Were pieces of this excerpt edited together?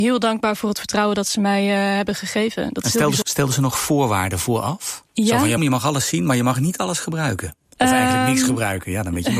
yes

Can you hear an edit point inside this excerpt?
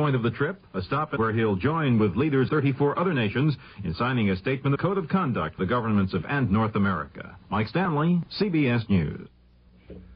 yes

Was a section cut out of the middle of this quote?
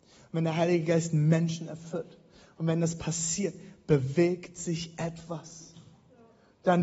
no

